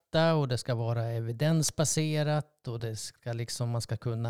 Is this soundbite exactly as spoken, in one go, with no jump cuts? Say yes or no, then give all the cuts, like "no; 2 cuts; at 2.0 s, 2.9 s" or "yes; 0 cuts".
yes; 0 cuts